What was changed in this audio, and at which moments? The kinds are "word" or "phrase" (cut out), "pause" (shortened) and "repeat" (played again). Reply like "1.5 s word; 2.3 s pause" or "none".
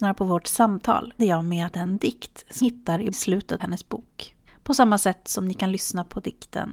1.2 s word; 1.7 s word; 2.6 s word; 3.1 s phrase; 3.6 s word; 4.5 s pause